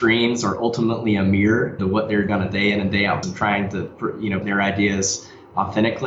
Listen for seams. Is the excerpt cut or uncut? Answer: cut